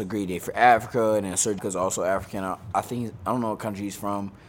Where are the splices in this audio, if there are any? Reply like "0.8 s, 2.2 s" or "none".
1.6 s